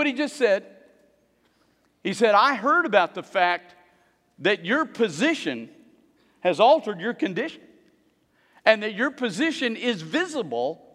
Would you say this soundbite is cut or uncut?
uncut